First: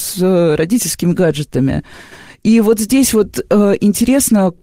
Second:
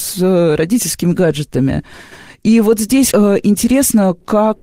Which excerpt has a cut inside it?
second; 1 cut; at 3.1 s

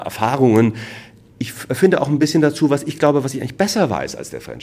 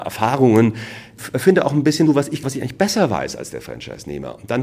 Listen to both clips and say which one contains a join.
second; 3 cuts; at 1.2 s, 2.1 s, 2.4 s

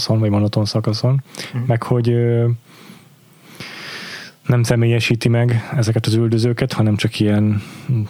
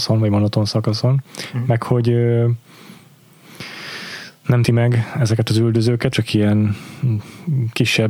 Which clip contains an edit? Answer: second; 2 cuts; at 4.6 s, 6.1 s

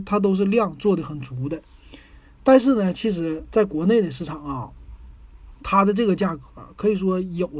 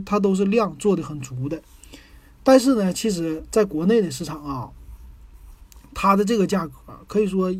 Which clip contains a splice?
first; 1 cut; at 5.6 s

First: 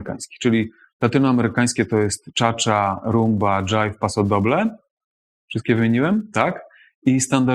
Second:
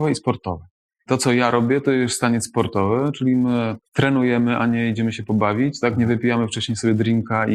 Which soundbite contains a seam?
second; 1 cut; at 3.9 s

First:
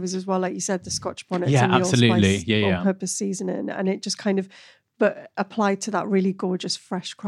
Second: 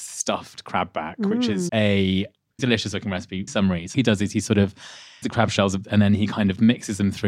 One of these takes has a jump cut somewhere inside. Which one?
second; 6 cuts; at 1.7 s, 2.6 s, 3.5 s, 3.9 s, 5.2 s, 5.8 s

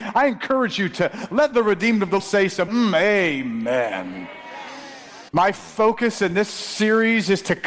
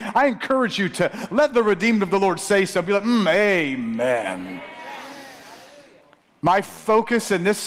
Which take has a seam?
first; 3 cuts; at 2.2 s, 2.7 s, 5.3 s

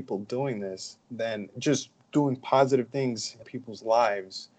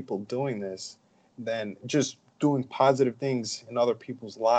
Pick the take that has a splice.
first; 2 cuts; at 1.0 s, 3.4 s

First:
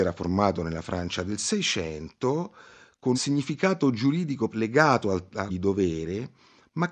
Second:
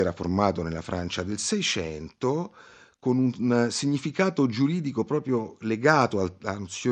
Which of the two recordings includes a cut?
first; 3 cuts; at 3.1 s, 4.5 s, 5.5 s

